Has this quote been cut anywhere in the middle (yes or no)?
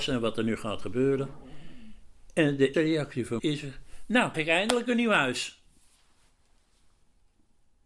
yes